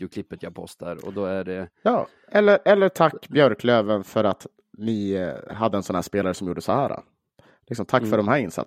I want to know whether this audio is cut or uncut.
uncut